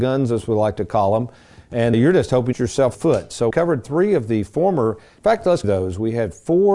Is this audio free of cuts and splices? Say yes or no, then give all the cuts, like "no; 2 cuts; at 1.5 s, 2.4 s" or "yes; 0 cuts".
no; 5 cuts; at 1.9 s, 2.5 s, 2.9 s, 3.5 s, 5.6 s